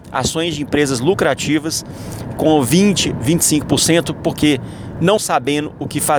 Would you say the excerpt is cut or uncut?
cut